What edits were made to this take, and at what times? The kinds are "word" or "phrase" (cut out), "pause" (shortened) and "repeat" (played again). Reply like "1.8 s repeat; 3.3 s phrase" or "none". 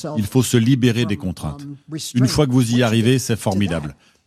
none